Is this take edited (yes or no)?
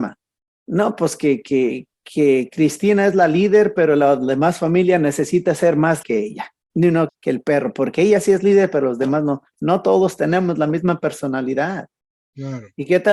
yes